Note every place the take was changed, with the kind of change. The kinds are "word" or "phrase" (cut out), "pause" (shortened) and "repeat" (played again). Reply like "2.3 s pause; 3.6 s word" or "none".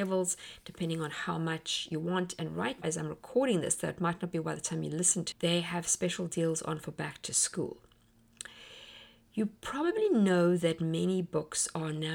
2.8 s word; 5.3 s word